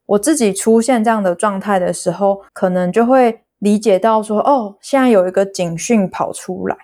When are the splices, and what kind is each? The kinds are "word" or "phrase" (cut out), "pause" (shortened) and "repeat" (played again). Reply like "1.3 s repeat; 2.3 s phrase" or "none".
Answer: 2.5 s pause